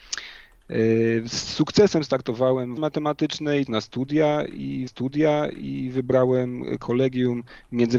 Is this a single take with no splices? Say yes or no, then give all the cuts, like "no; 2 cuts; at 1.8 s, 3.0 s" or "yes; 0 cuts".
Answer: no; 3 cuts; at 2.8 s, 3.7 s, 4.9 s